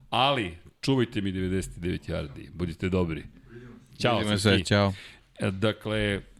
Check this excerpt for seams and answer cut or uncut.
uncut